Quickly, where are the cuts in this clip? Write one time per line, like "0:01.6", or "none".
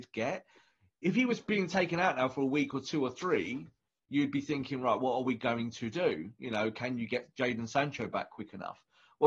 none